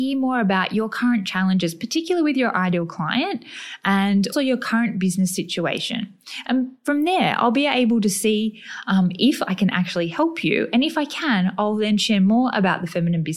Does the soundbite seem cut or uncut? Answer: cut